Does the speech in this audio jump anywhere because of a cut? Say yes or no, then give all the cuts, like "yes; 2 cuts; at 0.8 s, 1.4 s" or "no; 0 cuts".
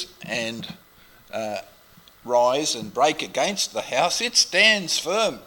no; 0 cuts